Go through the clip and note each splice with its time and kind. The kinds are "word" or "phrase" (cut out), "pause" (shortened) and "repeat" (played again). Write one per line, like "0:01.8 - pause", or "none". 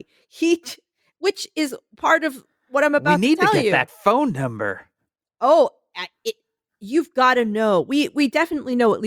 none

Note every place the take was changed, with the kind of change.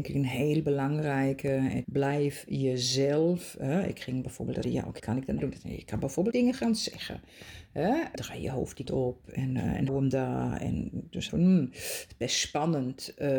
0:01.8 - word
0:04.6 - word
0:05.0 - word
0:05.4 - word
0:06.3 - word
0:08.2 - word
0:08.9 - word
0:09.9 - word
0:11.3 - word

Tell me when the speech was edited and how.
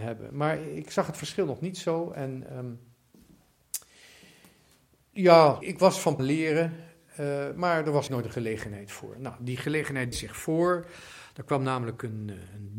0:05.6 - word
0:06.2 - phrase
0:08.1 - word
0:10.1 - word

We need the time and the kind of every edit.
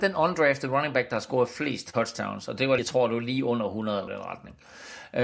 0:02.8 - word
0:04.1 - word

